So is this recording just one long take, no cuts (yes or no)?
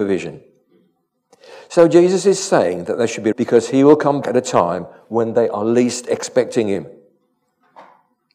no